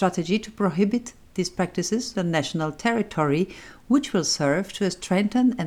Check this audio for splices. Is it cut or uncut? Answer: cut